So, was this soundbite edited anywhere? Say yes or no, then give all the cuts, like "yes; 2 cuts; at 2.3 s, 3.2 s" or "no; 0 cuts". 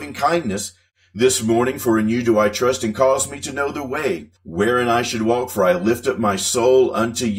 yes; 1 cut; at 4.4 s